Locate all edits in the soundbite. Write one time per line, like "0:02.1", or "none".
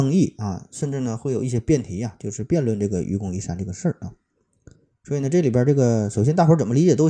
none